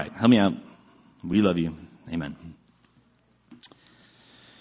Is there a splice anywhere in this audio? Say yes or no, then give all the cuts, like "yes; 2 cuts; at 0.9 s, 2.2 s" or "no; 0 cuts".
no; 0 cuts